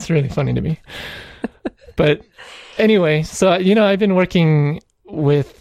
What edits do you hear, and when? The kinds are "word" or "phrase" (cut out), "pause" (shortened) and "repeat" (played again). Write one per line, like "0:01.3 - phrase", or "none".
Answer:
none